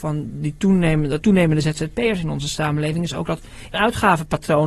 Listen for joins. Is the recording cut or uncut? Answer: cut